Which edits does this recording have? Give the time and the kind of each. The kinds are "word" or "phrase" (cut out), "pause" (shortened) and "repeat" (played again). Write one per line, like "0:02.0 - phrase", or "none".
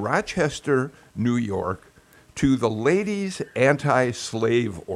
none